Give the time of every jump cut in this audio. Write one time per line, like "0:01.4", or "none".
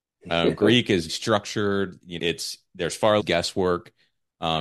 0:01.1
0:02.2
0:03.2